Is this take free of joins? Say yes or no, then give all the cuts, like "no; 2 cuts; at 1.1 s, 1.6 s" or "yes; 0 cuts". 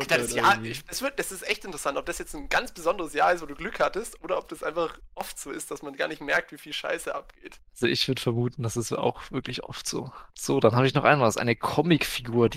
no; 2 cuts; at 7.7 s, 10.3 s